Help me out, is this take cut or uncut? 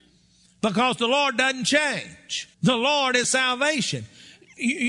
cut